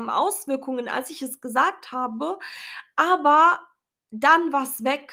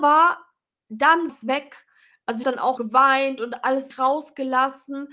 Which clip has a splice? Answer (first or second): second